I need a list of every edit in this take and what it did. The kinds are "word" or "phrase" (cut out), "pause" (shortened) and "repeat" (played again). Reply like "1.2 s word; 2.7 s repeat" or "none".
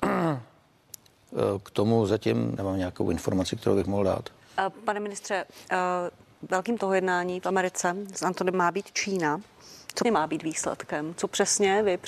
2.6 s word; 6.8 s word; 8.5 s word; 10.0 s word